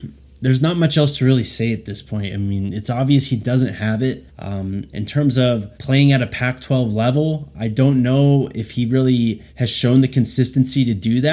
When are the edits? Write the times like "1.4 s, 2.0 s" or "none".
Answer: 4.3 s, 5.7 s, 9.5 s